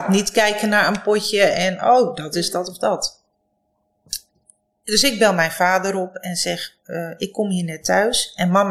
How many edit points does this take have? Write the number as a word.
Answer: zero